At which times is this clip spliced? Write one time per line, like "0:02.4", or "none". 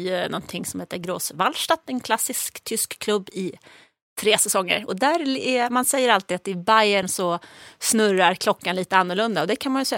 none